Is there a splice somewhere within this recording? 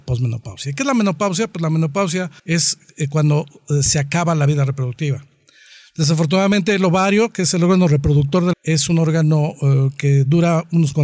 yes; 2 cuts; at 2.4 s, 8.5 s

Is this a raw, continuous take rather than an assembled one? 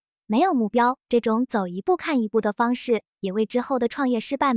no; 1 cut; at 1.0 s

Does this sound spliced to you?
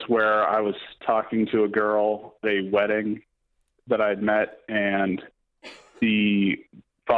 yes; 1 cut; at 2.4 s

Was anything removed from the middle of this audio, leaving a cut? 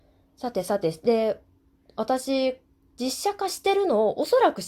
no; 0 cuts

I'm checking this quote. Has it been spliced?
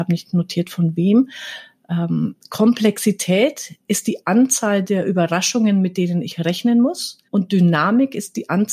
yes; 1 cut; at 7.2 s

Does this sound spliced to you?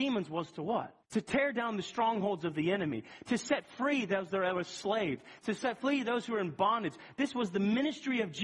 yes; 1 cut; at 1.0 s

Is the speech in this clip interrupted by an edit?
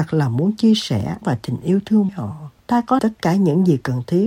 yes; 4 cuts; at 1.2 s, 2.1 s, 2.6 s, 3.0 s

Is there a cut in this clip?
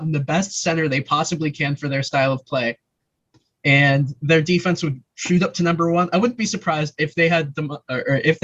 no; 0 cuts

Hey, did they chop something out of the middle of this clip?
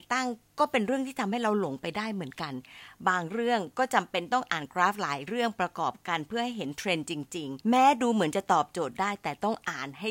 yes; 1 cut; at 7.6 s

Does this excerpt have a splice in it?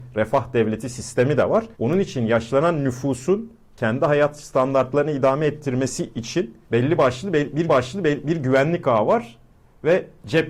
yes; 3 cuts; at 1.7 s, 6.6 s, 7.7 s

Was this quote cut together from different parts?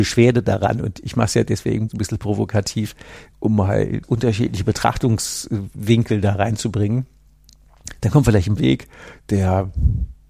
yes; 3 cuts; at 1.9 s, 4.0 s, 8.6 s

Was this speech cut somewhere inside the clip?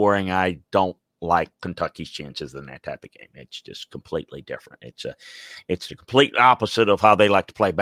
yes; 1 cut; at 1.5 s

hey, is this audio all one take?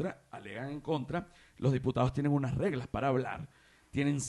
yes; 0 cuts

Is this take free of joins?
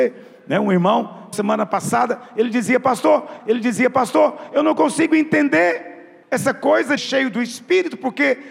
no; 4 cuts; at 1.3 s, 3.4 s, 6.2 s, 7.0 s

